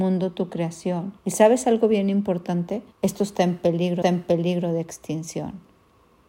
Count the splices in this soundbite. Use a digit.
3